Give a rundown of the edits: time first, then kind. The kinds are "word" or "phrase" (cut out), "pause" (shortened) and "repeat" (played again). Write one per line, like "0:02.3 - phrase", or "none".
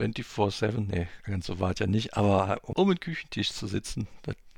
0:02.7 - word